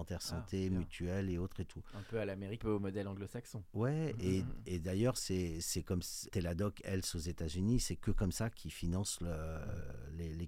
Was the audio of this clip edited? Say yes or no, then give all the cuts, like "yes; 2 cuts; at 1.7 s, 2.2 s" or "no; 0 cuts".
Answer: yes; 2 cuts; at 2.6 s, 6.3 s